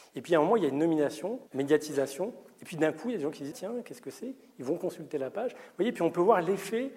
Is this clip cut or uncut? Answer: cut